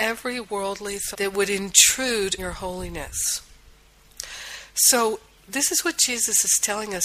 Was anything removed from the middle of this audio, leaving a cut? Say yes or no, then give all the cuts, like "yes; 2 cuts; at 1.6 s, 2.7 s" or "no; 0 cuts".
yes; 3 cuts; at 1.1 s, 2.4 s, 5.4 s